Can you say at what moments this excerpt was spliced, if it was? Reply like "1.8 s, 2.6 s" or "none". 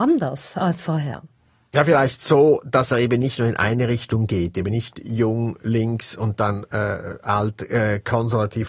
none